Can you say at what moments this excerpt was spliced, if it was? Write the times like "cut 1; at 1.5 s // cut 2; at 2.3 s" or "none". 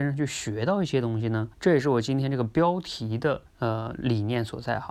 cut 1; at 1.5 s // cut 2; at 3.5 s